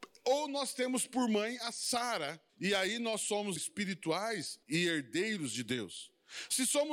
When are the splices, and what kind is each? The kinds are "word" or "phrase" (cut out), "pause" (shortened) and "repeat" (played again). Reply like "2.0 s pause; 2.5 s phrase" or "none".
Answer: 2.5 s pause; 3.6 s word; 4.6 s pause